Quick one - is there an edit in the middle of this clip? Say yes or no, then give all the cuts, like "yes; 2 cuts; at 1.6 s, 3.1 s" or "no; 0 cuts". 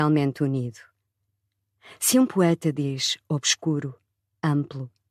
no; 0 cuts